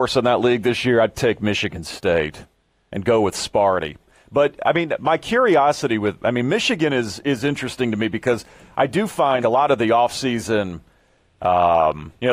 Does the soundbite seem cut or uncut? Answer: cut